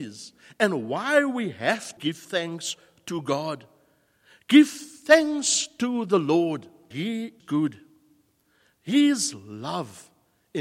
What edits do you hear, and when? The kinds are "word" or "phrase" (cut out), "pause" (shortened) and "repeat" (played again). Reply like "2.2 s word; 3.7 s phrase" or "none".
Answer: 2.0 s word; 6.9 s word; 7.4 s word